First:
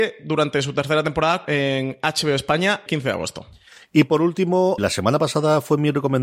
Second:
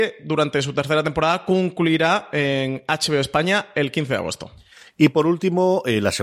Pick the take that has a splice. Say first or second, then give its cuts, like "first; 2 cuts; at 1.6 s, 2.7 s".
first; 3 cuts; at 1.4 s, 2.9 s, 4.8 s